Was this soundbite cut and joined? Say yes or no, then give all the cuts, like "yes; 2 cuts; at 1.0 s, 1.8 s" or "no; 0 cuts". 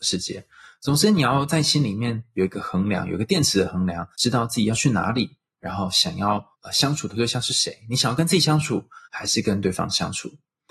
yes; 3 cuts; at 4.1 s, 6.5 s, 9.0 s